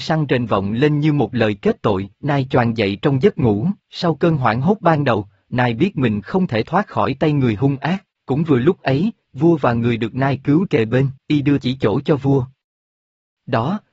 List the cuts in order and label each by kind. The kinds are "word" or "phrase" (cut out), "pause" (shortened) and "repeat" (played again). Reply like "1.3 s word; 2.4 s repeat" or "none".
2.1 s pause; 3.8 s pause; 8.1 s pause; 10.7 s word; 11.2 s pause; 11.6 s word